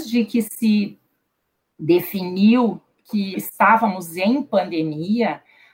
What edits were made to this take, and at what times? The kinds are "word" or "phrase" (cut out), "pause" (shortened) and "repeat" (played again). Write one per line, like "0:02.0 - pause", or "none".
0:03.3 - word